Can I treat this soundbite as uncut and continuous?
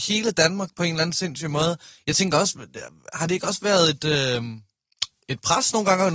yes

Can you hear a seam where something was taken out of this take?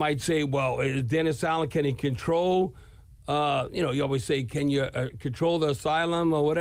no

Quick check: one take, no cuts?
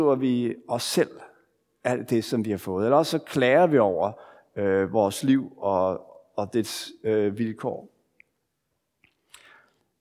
yes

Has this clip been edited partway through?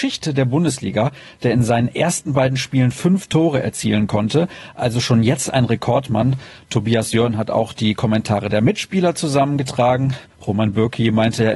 no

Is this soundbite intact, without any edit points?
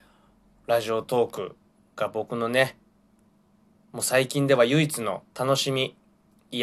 no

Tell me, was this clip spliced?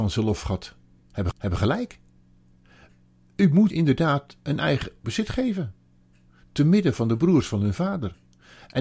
yes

